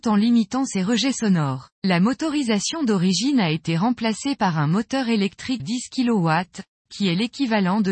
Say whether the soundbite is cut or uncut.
cut